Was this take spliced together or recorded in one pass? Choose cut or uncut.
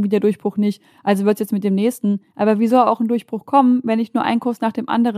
uncut